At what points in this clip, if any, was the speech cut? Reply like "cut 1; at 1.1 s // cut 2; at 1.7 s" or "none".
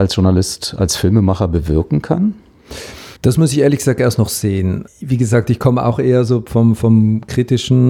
cut 1; at 3.2 s